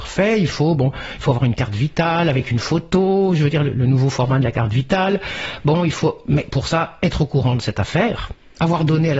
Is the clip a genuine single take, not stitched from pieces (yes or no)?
yes